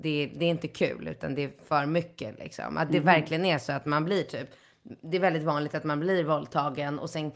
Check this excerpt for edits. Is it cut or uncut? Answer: uncut